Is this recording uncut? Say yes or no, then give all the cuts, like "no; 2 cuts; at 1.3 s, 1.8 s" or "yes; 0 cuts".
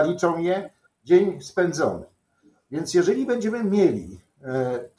yes; 0 cuts